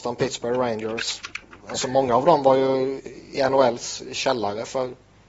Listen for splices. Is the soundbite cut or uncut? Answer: uncut